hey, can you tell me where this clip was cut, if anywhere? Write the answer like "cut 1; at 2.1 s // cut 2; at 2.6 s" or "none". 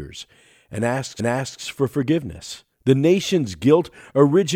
cut 1; at 1.2 s // cut 2; at 2.7 s